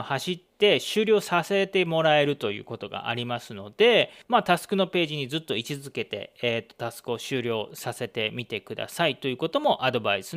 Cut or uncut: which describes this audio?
cut